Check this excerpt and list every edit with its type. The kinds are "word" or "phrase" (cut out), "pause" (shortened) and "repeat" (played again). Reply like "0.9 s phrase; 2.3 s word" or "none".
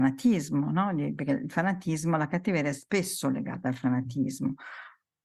none